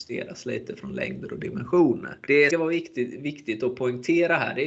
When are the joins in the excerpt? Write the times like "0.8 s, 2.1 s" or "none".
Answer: 2.5 s

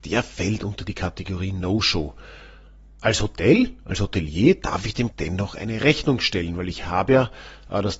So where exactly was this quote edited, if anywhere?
5.1 s

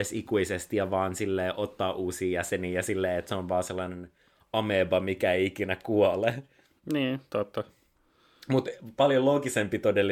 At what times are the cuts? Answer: none

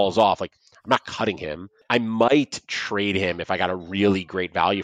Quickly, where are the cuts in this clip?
none

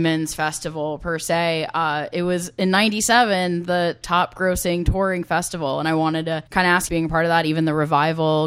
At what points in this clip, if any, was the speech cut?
4.0 s, 6.5 s, 6.9 s

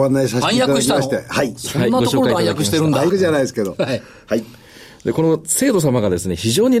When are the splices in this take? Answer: 3.1 s

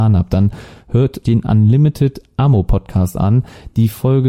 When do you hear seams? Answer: 1.2 s

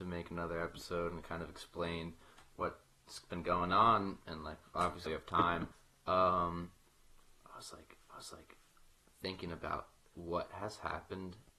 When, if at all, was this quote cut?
5.1 s, 5.7 s, 8.1 s

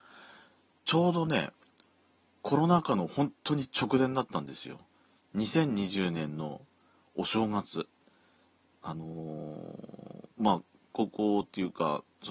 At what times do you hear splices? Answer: 10.3 s

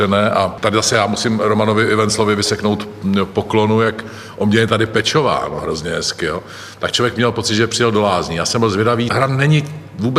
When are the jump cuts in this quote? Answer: none

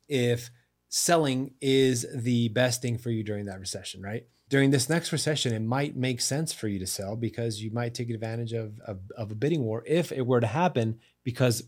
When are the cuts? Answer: none

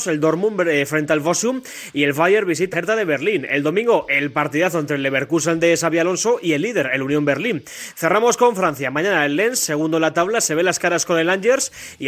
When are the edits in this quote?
2.7 s

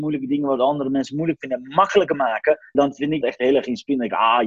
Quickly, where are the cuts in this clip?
2.7 s, 3.2 s

